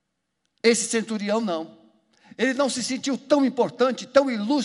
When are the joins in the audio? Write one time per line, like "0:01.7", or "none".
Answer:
none